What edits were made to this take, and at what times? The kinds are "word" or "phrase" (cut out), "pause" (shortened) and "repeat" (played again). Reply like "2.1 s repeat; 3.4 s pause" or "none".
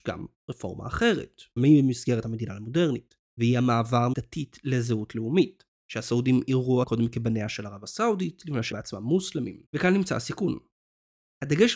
1.6 s word; 2.2 s word; 3.3 s pause; 4.1 s word; 5.7 s pause; 6.8 s word; 8.7 s word; 9.7 s pause